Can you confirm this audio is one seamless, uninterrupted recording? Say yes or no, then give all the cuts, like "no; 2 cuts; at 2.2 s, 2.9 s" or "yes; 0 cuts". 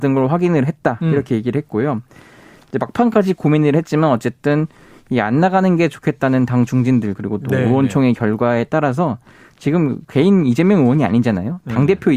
yes; 0 cuts